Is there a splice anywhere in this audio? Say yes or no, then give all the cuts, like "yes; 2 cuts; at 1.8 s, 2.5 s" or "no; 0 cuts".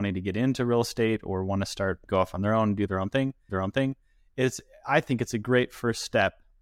yes; 2 cuts; at 2.1 s, 3.5 s